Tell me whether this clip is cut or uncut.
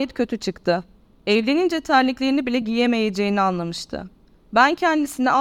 uncut